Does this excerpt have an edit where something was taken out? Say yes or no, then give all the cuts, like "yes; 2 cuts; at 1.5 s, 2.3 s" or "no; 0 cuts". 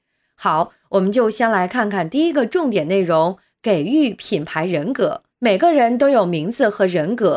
yes; 1 cut; at 5.3 s